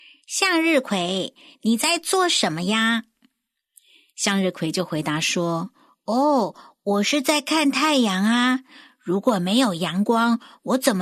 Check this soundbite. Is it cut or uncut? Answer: uncut